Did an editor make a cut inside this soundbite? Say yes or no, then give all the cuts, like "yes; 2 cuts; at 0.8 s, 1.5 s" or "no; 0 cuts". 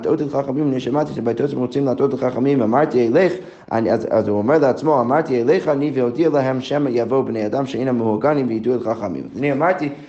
no; 0 cuts